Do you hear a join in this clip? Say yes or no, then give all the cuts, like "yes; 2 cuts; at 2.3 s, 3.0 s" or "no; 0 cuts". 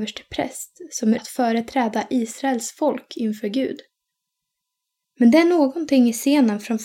yes; 1 cut; at 1.2 s